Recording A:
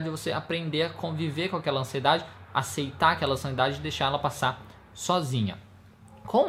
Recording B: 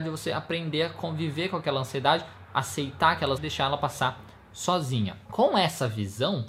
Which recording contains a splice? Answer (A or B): B